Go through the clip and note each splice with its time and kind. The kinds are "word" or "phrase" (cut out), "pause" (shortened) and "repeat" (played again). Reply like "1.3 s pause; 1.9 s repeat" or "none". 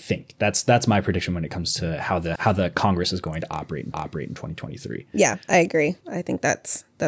2.4 s word; 3.9 s repeat; 5.4 s pause; 6.0 s pause